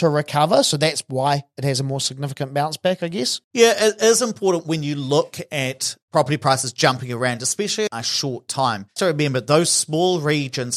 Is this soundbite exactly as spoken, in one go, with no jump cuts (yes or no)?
no